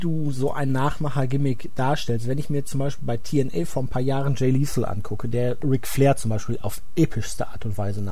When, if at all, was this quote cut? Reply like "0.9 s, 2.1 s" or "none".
none